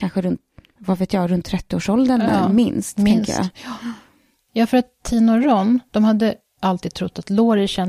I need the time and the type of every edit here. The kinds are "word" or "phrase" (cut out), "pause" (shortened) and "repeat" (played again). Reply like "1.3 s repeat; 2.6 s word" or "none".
none